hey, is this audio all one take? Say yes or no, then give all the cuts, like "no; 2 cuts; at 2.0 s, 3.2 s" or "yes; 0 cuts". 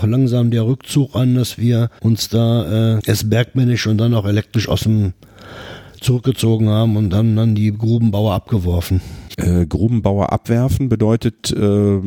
no; 1 cut; at 3.0 s